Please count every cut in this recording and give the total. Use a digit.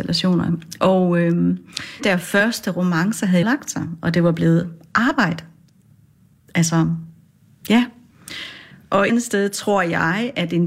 3